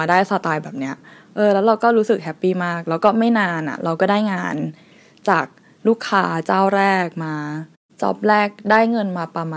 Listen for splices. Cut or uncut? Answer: uncut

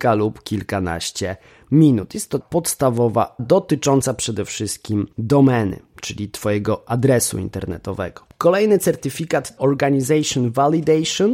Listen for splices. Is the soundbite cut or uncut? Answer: cut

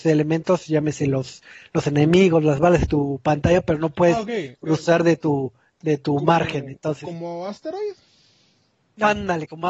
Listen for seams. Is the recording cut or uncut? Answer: uncut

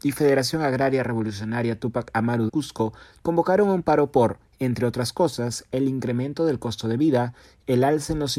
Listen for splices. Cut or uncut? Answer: cut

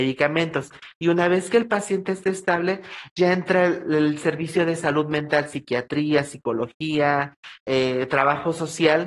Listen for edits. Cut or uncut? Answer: uncut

